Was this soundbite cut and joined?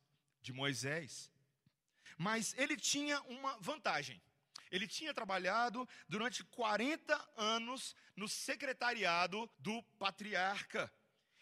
yes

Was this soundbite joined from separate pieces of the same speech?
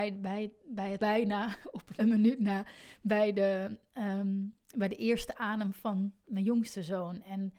yes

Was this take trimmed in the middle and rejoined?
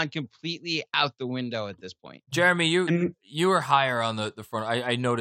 no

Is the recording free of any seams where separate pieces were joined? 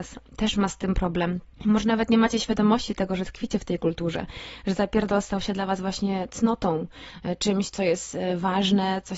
no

